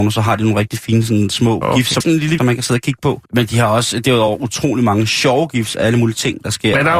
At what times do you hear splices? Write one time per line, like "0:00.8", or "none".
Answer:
0:02.0
0:02.4
0:03.2